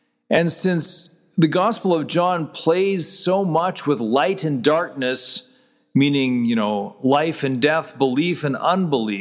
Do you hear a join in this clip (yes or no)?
no